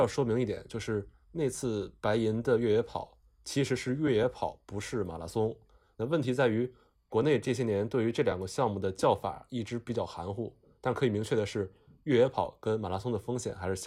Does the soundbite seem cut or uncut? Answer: uncut